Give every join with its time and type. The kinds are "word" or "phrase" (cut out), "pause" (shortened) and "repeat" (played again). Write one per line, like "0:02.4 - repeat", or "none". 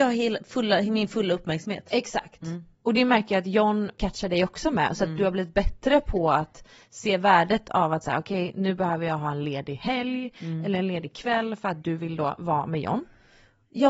none